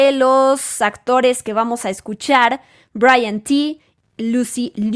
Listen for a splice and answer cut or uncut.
uncut